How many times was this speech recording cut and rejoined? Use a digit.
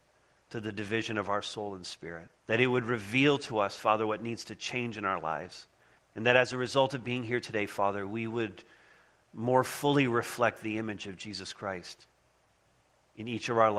2